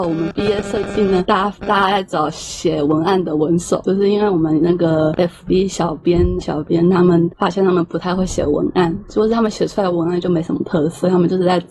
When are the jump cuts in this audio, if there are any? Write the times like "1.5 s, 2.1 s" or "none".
5.1 s, 6.4 s